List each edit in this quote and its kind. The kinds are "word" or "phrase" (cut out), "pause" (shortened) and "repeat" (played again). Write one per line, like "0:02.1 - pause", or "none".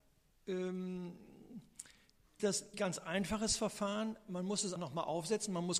0:02.4 - word
0:02.7 - word
0:04.8 - word